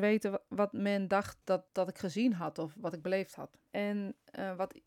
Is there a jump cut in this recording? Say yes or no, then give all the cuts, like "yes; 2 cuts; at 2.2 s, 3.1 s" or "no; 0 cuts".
yes; 2 cuts; at 1.7 s, 3.7 s